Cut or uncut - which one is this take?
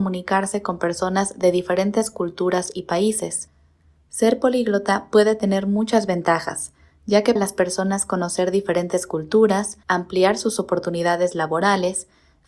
cut